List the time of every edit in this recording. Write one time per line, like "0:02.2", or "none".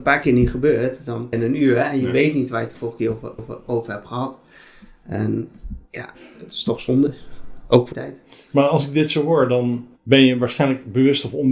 0:01.3
0:03.4
0:05.9
0:07.9
0:10.0